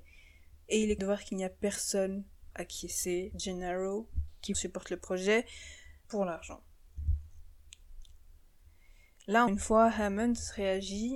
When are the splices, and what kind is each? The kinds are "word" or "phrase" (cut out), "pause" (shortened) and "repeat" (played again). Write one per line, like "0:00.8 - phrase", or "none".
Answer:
0:01.0 - word
0:02.5 - word
0:03.3 - word
0:04.5 - word
0:06.0 - word
0:09.5 - word